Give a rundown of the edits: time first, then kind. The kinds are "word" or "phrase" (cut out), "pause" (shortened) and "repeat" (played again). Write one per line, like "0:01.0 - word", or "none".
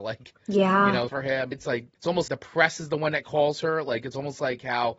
0:01.1 - phrase
0:01.5 - word
0:01.9 - pause
0:02.3 - word